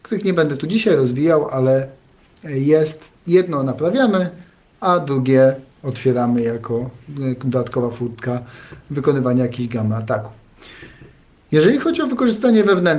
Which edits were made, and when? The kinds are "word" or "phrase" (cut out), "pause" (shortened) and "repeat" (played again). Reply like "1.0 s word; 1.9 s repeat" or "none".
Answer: 3.1 s phrase

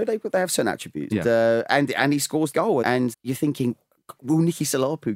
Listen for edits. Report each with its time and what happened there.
1.1 s word; 1.7 s word; 2.5 s word; 2.8 s word; 3.1 s word

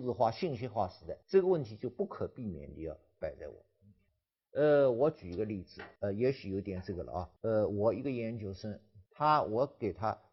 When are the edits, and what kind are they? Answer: 1.2 s pause; 4.1 s pause; 6.0 s pause; 7.4 s pause; 9.1 s pause

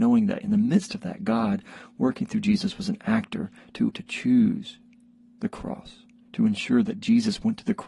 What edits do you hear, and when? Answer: 3.9 s word

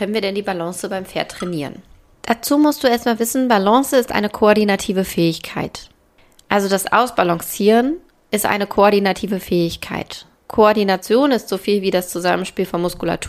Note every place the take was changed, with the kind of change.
none

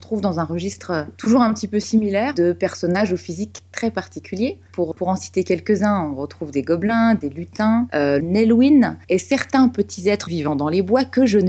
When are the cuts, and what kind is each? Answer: 4.9 s word; 8.2 s phrase; 9.0 s pause; 10.3 s word

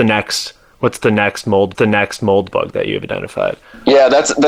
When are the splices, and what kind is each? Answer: 1.7 s repeat

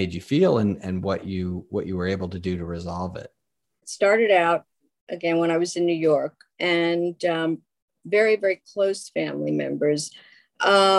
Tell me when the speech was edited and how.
none

